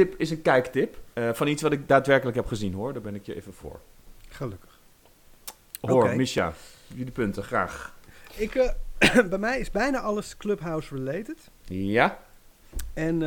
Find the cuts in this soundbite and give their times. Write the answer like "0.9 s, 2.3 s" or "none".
1.1 s